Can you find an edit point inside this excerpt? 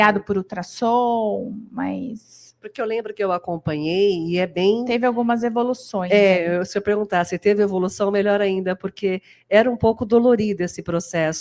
no; 0 cuts

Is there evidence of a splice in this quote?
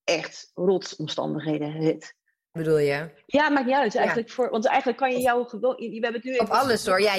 yes; 1 cut; at 2.6 s

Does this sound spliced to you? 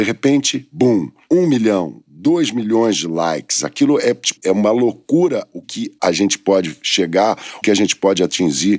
yes; 3 cuts; at 4.4 s, 5.6 s, 7.6 s

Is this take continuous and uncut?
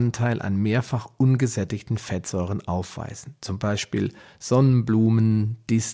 yes; 0 cuts

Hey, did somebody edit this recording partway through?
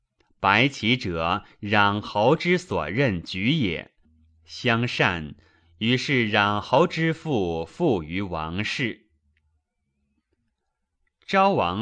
no; 0 cuts

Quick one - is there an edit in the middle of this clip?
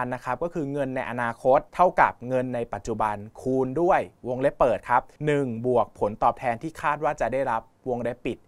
yes; 2 cuts; at 1.7 s, 5.2 s

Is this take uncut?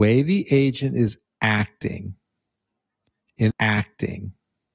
no; 1 cut; at 3.5 s

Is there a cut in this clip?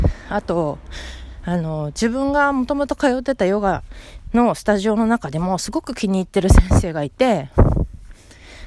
no; 0 cuts

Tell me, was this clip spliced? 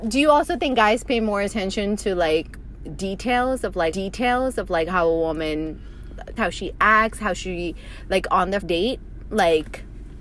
yes; 3 cuts; at 3.9 s, 6.4 s, 8.6 s

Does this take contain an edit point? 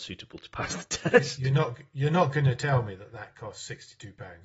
no; 0 cuts

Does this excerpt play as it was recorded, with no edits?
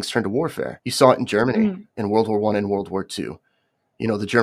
yes; 0 cuts

